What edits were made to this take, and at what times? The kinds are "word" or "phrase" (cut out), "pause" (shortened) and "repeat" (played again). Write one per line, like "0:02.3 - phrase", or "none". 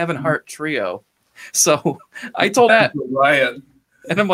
0:02.7 - word